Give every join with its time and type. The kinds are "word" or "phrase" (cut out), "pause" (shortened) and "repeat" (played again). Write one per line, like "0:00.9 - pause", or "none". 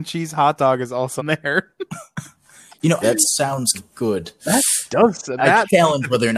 0:01.2 - word
0:03.0 - word
0:03.7 - word
0:05.4 - word